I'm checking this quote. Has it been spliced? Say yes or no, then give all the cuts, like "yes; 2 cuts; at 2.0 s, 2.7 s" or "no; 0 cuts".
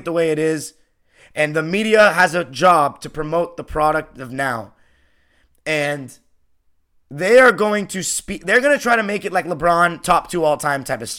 no; 0 cuts